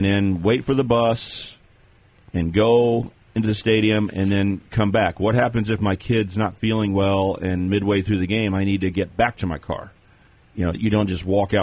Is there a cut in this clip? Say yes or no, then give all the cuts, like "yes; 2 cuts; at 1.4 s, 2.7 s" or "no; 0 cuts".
no; 0 cuts